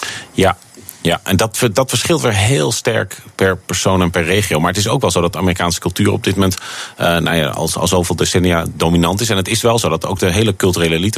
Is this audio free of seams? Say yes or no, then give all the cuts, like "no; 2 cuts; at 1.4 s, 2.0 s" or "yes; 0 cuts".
yes; 0 cuts